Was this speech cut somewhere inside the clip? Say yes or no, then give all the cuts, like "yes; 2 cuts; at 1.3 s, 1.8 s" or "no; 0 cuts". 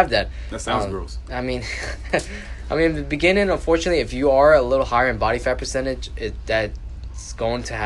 no; 0 cuts